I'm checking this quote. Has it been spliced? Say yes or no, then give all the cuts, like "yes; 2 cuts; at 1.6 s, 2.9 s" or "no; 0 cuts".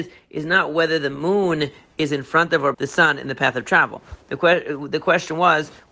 yes; 1 cut; at 2.7 s